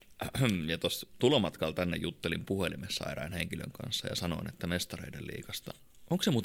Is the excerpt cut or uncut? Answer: uncut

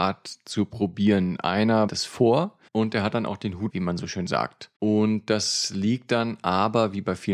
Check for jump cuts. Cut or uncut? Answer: cut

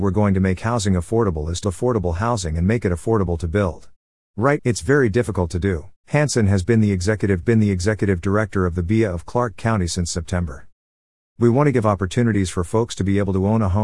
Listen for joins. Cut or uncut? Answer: cut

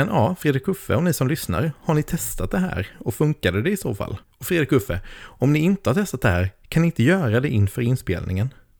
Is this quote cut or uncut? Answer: cut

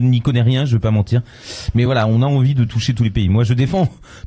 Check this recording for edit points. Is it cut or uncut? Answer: uncut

